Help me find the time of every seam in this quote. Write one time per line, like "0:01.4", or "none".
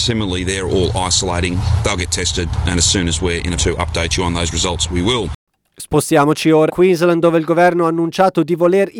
0:03.6
0:06.7

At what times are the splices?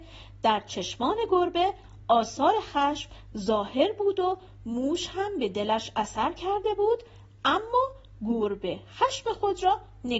none

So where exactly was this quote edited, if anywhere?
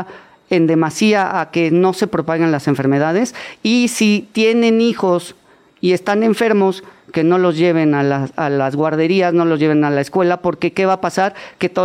none

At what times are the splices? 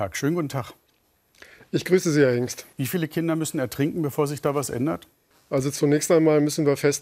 0:02.7
0:05.3

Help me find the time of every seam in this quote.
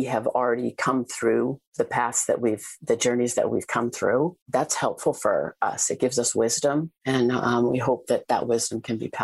0:04.4

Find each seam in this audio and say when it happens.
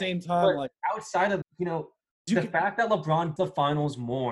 0:01.4
0:02.3
0:03.4

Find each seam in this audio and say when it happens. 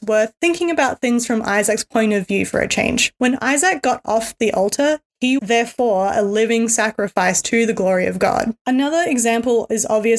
0:05.4

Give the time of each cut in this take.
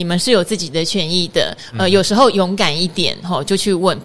none

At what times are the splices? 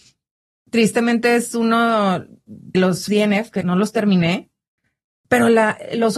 0:02.7
0:03.1
0:03.6

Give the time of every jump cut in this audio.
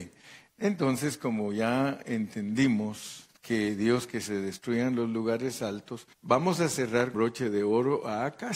0:03.4
0:04.1
0:06.1
0:07.1

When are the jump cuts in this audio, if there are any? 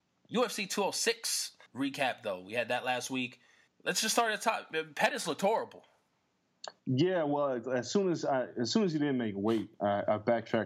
0:01.7
0:03.7
0:06.8

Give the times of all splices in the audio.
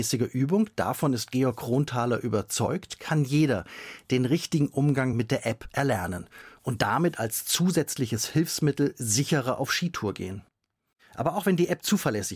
none

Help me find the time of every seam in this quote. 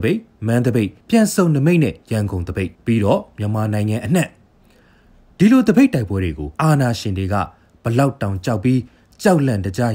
0:01.0
0:02.7
0:06.5

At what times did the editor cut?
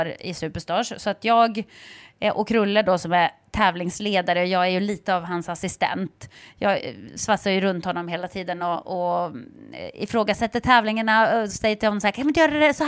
none

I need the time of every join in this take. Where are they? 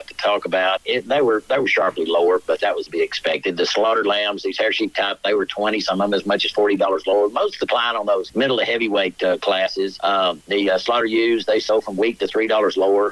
none

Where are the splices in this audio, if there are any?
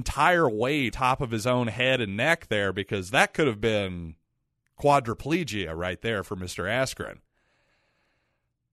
0:00.9

